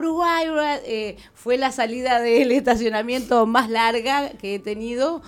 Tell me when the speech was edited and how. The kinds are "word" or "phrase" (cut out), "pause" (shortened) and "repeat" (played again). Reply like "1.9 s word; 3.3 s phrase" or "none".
none